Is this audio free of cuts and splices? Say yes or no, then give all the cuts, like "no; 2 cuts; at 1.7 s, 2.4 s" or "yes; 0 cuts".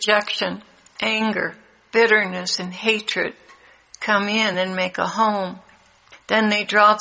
yes; 0 cuts